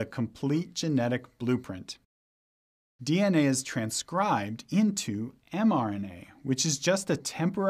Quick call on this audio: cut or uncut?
uncut